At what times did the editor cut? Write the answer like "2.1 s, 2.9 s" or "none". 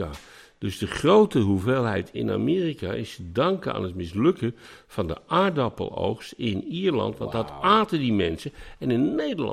2.1 s